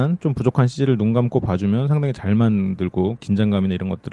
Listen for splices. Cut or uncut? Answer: uncut